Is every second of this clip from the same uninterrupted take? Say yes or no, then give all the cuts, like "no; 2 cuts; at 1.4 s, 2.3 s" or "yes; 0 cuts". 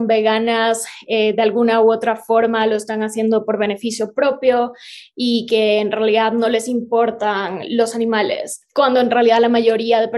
no; 1 cut; at 8.7 s